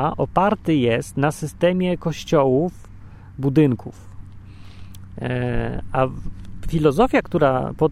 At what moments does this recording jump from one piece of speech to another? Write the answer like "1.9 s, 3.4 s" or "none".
none